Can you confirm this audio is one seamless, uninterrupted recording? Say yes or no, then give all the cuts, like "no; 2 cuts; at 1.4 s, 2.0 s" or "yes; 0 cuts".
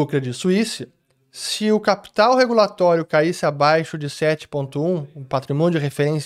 yes; 0 cuts